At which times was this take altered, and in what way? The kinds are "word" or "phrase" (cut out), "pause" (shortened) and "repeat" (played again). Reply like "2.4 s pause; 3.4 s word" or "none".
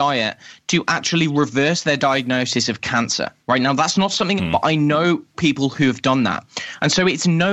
3.4 s pause; 4.4 s phrase; 5.3 s word